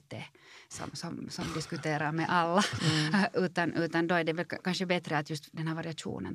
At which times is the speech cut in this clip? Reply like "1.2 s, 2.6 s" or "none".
none

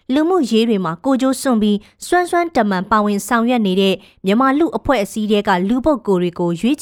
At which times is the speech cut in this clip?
none

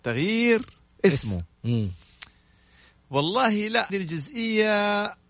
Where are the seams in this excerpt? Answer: 3.9 s

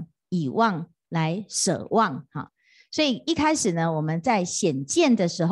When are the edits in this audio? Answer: none

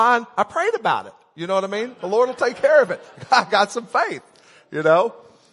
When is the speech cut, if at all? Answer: none

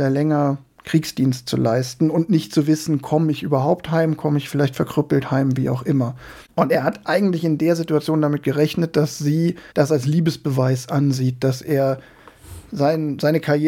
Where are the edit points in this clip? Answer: 6.5 s, 9.7 s

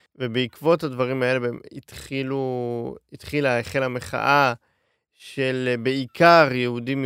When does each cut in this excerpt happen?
none

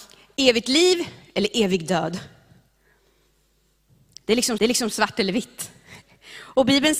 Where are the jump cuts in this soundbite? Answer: 4.6 s

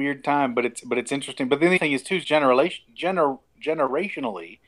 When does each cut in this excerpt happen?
1.8 s, 2.2 s

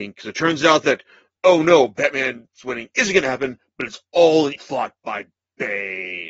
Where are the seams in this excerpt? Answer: 4.5 s

